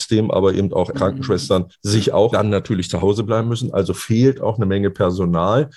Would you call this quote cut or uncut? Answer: cut